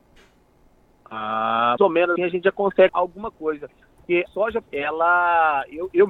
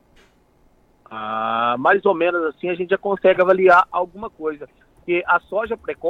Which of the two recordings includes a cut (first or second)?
first